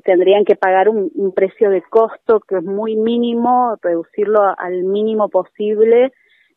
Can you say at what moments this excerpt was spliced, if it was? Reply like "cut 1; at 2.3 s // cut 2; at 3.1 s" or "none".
none